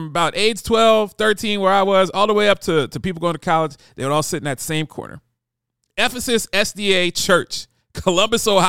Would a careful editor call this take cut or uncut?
uncut